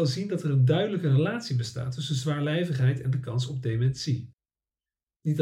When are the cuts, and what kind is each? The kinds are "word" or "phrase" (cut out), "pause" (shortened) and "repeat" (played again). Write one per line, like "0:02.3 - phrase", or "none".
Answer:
none